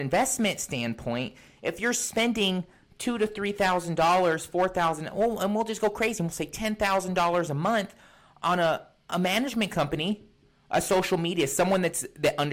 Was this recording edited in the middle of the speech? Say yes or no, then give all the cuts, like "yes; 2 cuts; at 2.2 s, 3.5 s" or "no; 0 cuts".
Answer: no; 0 cuts